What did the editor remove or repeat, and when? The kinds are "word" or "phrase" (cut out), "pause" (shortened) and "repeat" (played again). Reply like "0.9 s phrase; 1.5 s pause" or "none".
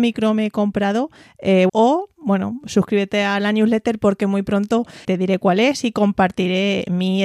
1.7 s phrase; 5.0 s word

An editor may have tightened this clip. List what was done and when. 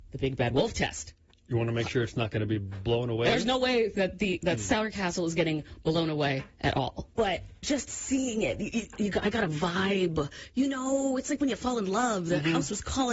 1.3 s pause; 7.1 s pause

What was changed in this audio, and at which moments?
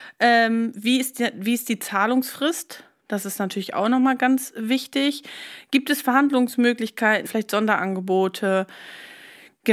7.3 s word

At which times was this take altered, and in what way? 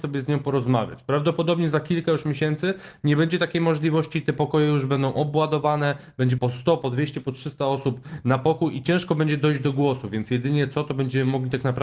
6.4 s word

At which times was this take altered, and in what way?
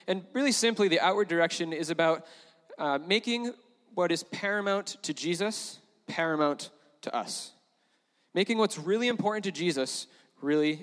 none

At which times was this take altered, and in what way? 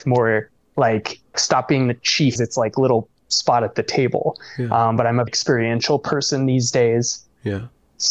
1.3 s word; 2.4 s phrase; 5.3 s word

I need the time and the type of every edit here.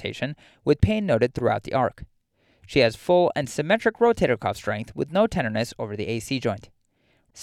none

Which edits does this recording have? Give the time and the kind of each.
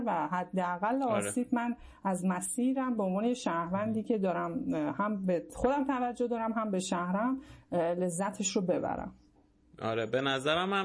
none

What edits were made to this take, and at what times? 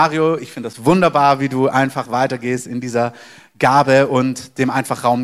none

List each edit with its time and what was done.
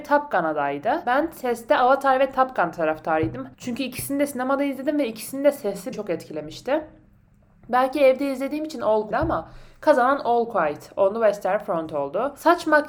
3.5 s pause; 5.9 s word; 9.1 s phrase

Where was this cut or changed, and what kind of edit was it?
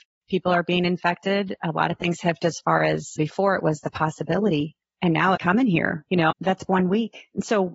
2.4 s word; 3.2 s word; 5.3 s word; 6.3 s word

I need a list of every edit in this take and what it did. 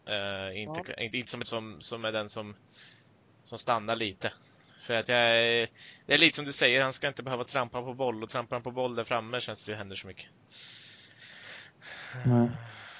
1.4 s phrase; 9.7 s phrase

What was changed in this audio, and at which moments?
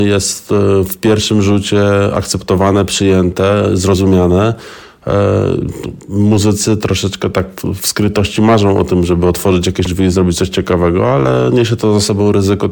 9.9 s word

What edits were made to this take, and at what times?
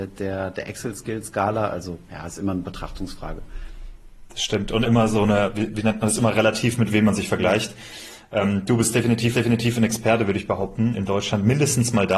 4.8 s word; 9.3 s repeat; 10.9 s word

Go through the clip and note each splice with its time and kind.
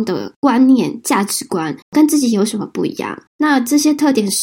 1.8 s pause; 3.3 s pause

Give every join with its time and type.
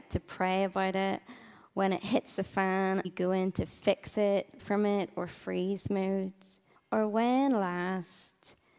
3.0 s word; 4.6 s word; 6.7 s pause

